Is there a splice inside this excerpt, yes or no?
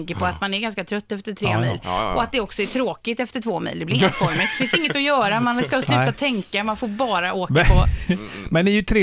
no